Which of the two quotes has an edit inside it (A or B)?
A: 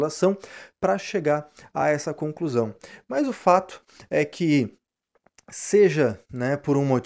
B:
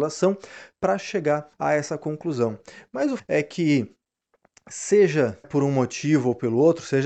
B